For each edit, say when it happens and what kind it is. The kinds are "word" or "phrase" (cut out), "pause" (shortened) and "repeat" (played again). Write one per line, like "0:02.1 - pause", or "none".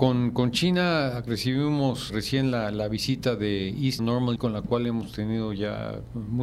0:01.3 - word
0:02.1 - word
0:04.0 - word
0:04.4 - word

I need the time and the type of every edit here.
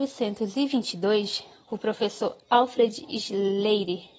none

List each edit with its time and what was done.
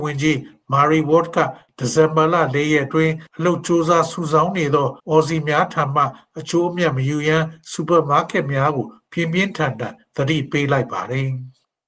0:03.3 - pause
0:05.0 - pause

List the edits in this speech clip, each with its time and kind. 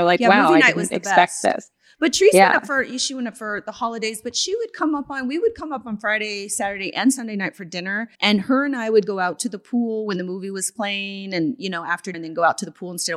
0:08.1 - pause
0:12.1 - word

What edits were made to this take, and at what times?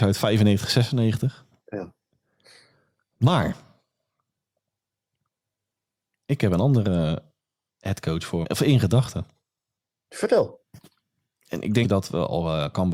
0:08.4 - word
0:11.8 - word

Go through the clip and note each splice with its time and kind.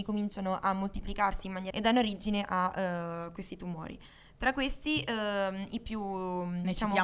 0:01.7 - word

